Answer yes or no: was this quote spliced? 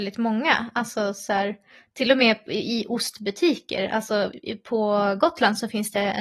no